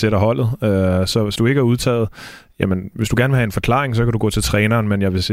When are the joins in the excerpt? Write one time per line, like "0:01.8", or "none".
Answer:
0:01.4

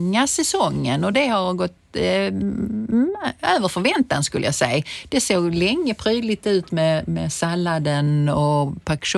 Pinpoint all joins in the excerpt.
none

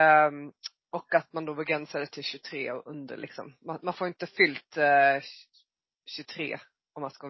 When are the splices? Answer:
none

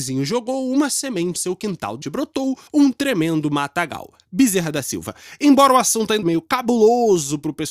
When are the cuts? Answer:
0:01.4
0:02.0
0:02.7
0:06.2

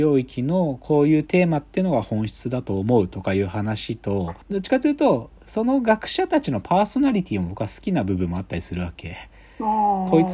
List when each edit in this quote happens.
0:04.4

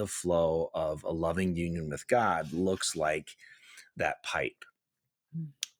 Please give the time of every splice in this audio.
none

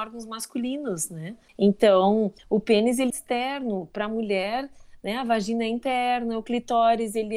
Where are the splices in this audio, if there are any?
0:03.1

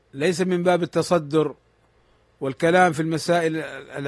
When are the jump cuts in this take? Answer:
none

